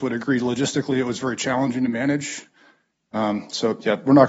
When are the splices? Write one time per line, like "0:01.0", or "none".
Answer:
none